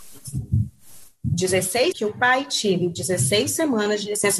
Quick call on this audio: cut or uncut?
cut